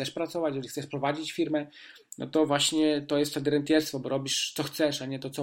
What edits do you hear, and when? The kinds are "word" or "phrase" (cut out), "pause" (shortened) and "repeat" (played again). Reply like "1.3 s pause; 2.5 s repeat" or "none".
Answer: none